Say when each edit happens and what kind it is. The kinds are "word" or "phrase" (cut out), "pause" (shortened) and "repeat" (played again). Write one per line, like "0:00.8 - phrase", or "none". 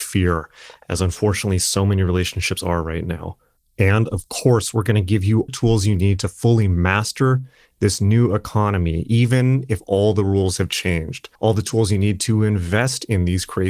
0:05.5 - phrase
0:11.3 - pause